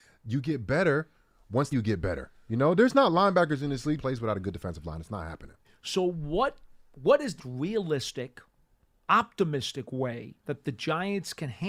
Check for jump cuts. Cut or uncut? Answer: cut